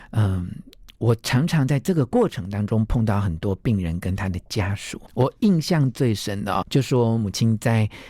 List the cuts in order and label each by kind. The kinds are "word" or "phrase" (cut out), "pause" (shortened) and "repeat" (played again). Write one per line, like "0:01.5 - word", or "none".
0:05.1 - word
0:06.6 - word

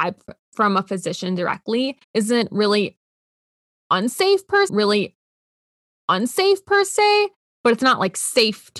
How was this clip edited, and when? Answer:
0:02.0 - pause
0:04.7 - repeat

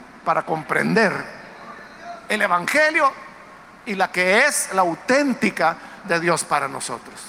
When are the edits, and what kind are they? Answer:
0:06.0 - word

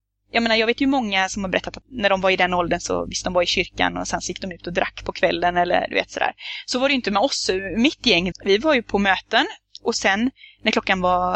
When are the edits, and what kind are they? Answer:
0:01.8 - word
0:08.3 - word

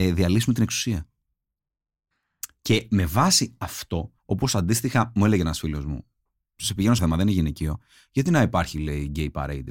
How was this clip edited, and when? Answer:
0:04.2 - pause
0:07.0 - word

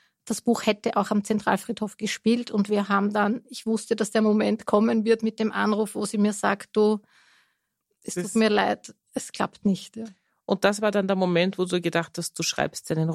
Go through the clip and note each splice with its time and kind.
0:09.0 - pause

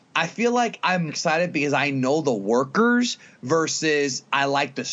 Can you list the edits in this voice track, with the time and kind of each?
0:01.1 - word

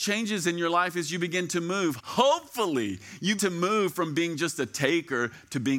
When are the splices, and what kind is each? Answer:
0:02.0 - word
0:03.4 - word

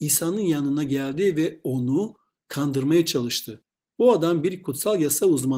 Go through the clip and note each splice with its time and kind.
none

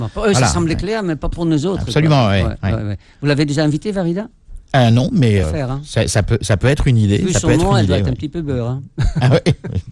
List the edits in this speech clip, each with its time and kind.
0:05.4 - word

